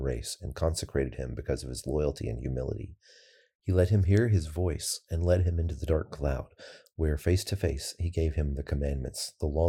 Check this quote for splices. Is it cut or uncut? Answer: uncut